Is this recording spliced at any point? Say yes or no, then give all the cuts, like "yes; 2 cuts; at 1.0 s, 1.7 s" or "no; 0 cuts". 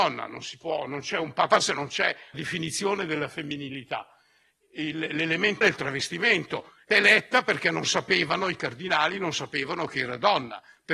yes; 4 cuts; at 1.6 s, 2.3 s, 5.6 s, 6.9 s